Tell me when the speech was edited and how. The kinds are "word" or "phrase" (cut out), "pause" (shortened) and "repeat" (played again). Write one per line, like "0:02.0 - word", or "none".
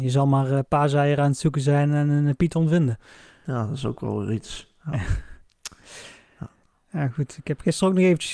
none